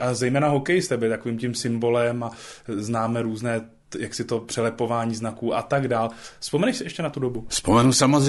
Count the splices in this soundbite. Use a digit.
0